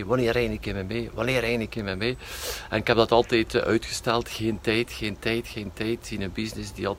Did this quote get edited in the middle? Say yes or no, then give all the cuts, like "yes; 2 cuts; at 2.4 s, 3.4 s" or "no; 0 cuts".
no; 0 cuts